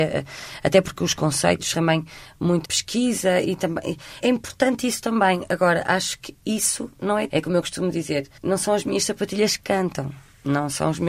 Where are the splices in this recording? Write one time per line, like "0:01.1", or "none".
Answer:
0:01.7
0:02.6
0:04.2
0:07.3
0:08.4